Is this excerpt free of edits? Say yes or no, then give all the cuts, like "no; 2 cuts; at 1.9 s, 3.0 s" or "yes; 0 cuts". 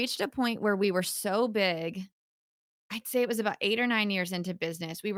yes; 0 cuts